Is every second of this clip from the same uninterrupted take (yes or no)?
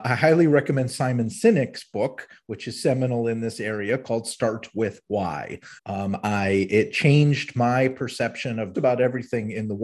no